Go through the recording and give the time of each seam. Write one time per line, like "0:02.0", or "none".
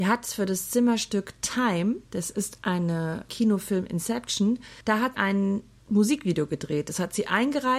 0:02.0
0:03.3
0:05.1